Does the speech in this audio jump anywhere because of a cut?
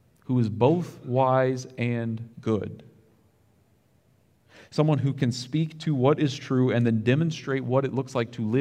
yes; 1 cut; at 2.3 s

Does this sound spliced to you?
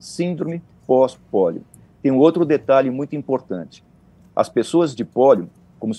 no; 0 cuts

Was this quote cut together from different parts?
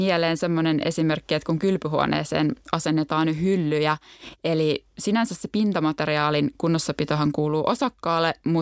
no; 0 cuts

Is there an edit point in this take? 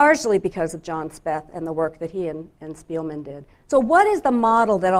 yes; 1 cut; at 3.5 s

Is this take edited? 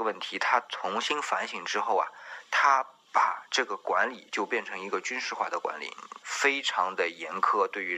yes; 1 cut; at 6.2 s

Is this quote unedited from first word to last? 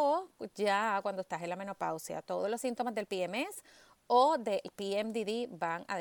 yes; 0 cuts

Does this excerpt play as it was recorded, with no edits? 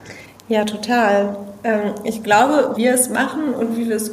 no; 1 cut; at 2.8 s

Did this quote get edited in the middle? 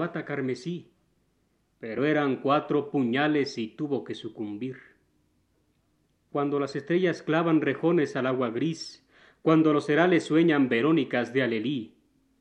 no; 0 cuts

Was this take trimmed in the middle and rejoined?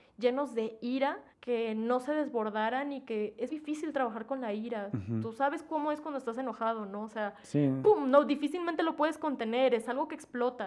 yes; 2 cuts; at 1.3 s, 3.5 s

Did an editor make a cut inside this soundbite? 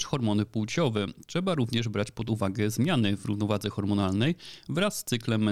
no; 0 cuts

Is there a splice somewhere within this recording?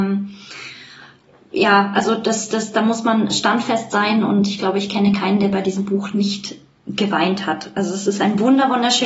no; 0 cuts

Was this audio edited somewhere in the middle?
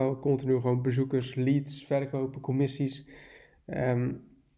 no; 0 cuts

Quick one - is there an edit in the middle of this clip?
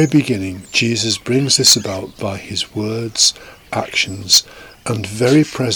no; 0 cuts

